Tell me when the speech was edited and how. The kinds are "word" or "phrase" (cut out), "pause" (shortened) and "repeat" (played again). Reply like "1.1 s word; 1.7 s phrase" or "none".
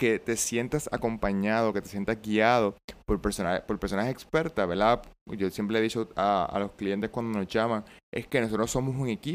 none